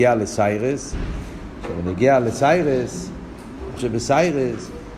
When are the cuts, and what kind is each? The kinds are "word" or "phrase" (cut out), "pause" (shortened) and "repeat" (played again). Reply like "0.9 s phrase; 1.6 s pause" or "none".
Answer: 3.8 s word